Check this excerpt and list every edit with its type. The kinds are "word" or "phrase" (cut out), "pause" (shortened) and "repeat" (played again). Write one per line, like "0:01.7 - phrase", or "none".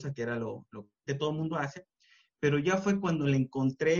0:01.1 - word